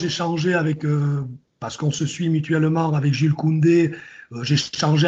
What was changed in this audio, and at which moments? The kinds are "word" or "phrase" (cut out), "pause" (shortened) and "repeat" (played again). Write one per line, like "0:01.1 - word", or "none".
none

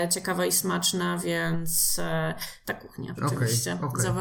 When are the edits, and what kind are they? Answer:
0:03.2 - word

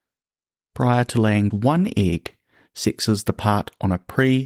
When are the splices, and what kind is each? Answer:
0:01.5 - word

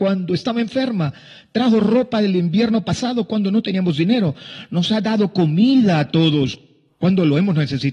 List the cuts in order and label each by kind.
none

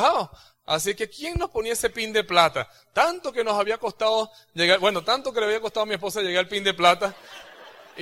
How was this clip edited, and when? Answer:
none

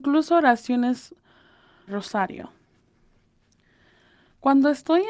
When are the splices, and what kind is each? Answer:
0:01.9 - phrase

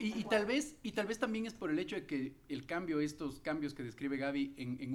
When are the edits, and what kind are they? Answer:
none

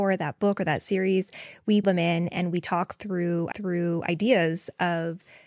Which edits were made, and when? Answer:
0:01.8 - word
0:03.5 - repeat

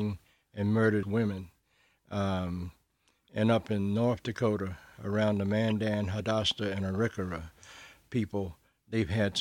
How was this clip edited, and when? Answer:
0:01.0 - word

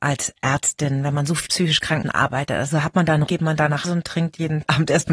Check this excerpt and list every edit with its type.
0:01.5 - word
0:02.0 - word
0:03.3 - word
0:03.8 - word

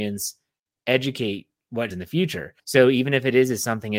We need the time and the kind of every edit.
0:01.9 - word
0:02.6 - pause

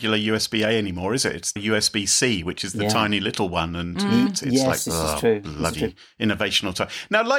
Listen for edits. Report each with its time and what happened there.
0:01.6 - word

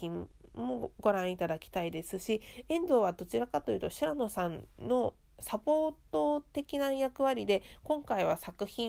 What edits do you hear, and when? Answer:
0:04.7 - pause

